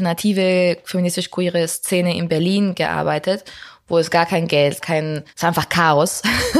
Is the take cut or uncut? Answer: cut